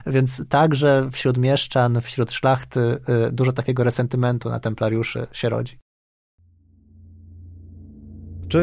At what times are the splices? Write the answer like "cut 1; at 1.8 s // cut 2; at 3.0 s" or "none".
none